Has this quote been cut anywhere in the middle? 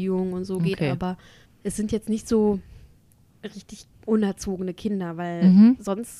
yes; 2 cuts; at 1.5 s, 3.9 s

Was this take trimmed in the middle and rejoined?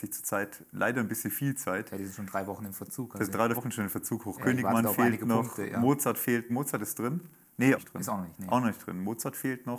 yes; 3 cuts; at 3.5 s, 6.5 s, 7.7 s

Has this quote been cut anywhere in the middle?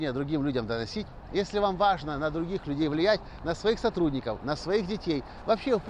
no; 0 cuts

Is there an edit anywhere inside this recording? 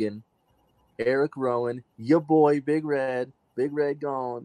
no; 0 cuts

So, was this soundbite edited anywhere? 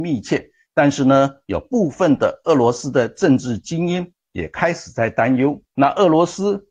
yes; 1 cut; at 5.7 s

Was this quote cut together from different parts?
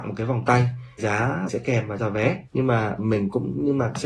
yes; 5 cuts; at 1.0 s, 1.5 s, 2.0 s, 2.5 s, 3.0 s

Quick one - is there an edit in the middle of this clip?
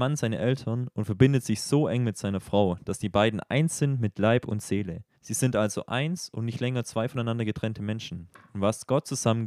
yes; 1 cut; at 5.1 s

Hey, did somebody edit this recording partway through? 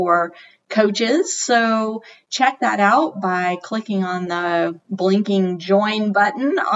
no; 0 cuts

